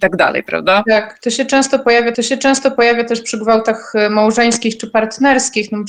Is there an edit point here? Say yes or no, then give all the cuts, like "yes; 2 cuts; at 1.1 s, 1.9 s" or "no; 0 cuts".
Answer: yes; 1 cut; at 2.1 s